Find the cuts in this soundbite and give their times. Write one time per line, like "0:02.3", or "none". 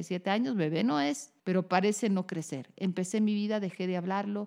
0:01.4

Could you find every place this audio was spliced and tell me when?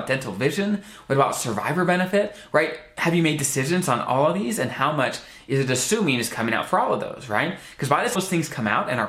0:08.1

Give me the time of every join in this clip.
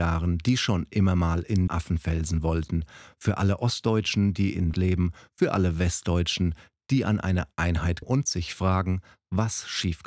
0:01.7
0:04.7
0:08.0

